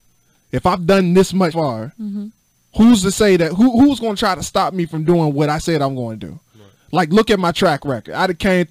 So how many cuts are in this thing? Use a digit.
1